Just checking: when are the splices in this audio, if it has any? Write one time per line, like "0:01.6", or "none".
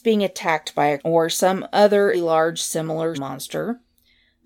0:01.0
0:02.1
0:03.1